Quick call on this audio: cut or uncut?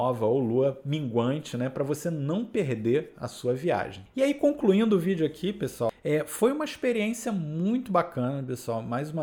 uncut